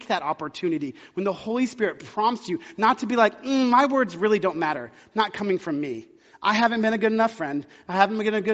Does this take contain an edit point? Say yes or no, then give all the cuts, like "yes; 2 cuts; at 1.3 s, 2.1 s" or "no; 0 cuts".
no; 0 cuts